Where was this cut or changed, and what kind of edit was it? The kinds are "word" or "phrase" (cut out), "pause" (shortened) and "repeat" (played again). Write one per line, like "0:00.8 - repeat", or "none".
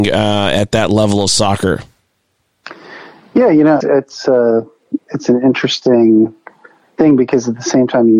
0:03.8 - word